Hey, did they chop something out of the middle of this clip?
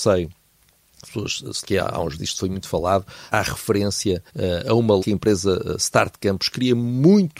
yes; 6 cuts; at 1.0 s, 1.6 s, 2.2 s, 3.3 s, 4.3 s, 5.0 s

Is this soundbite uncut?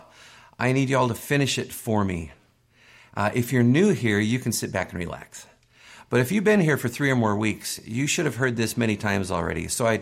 yes; 0 cuts

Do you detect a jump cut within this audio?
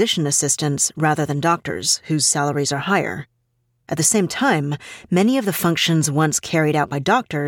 no; 0 cuts

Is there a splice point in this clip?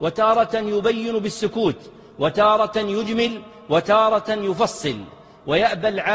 no; 0 cuts

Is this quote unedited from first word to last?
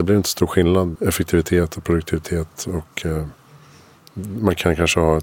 no; 1 cut; at 0.9 s

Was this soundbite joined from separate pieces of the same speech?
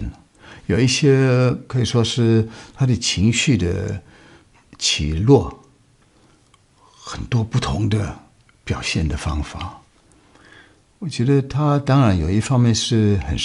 no; 0 cuts

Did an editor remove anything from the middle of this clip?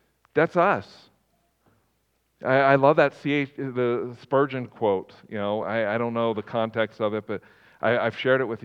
no; 0 cuts

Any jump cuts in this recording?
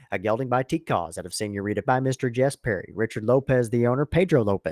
yes; 1 cut; at 1.8 s

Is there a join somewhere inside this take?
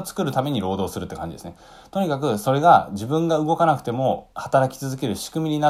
yes; 1 cut; at 4.3 s

